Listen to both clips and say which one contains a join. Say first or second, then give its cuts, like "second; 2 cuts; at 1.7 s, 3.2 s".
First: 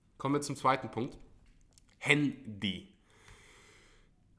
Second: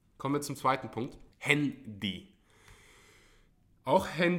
second; 1 cut; at 1.3 s